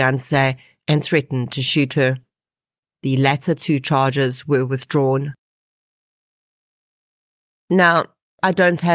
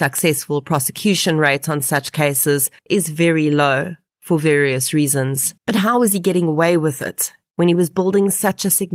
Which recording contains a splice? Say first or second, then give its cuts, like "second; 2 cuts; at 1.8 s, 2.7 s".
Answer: second; 2 cuts; at 2.8 s, 5.6 s